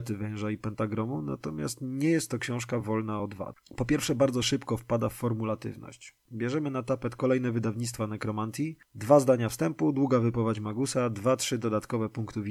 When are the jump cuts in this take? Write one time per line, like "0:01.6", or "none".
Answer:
none